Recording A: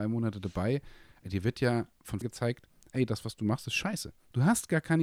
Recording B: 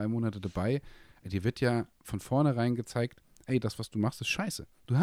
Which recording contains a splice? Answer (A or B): A